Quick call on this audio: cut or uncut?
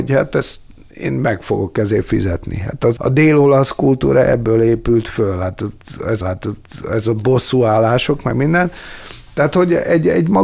cut